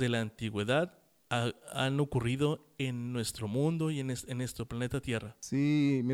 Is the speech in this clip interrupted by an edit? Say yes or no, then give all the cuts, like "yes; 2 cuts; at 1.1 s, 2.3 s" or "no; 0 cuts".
no; 0 cuts